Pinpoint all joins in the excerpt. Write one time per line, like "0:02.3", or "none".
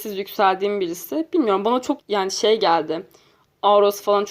0:02.0